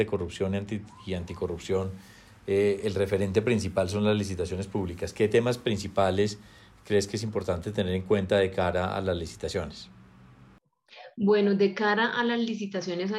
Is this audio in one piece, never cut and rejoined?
yes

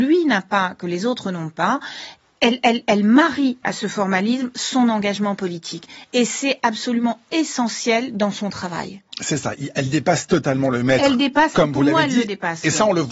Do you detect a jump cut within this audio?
no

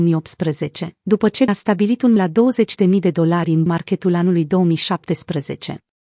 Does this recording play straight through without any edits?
no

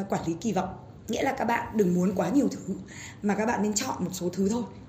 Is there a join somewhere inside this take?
no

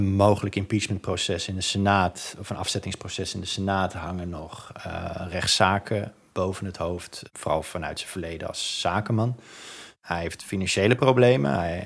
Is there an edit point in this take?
no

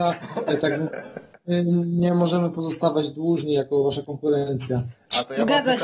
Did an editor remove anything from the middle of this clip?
no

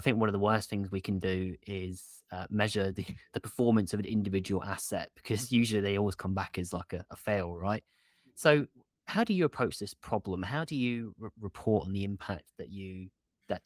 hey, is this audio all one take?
yes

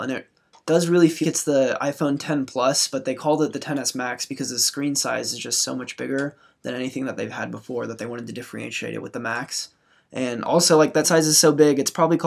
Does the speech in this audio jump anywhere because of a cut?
yes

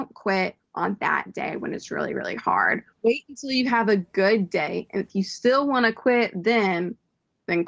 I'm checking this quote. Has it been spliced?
yes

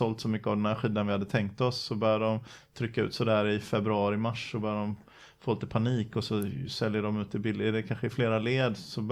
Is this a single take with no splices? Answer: yes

